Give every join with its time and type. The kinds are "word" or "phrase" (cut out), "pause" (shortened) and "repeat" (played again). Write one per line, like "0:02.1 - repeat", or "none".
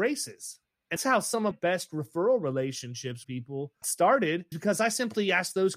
0:01.0 - word
0:01.5 - word
0:03.2 - word
0:03.8 - word
0:04.5 - word